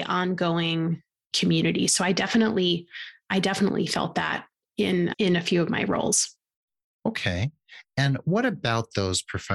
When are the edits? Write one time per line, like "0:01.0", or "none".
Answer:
0:05.1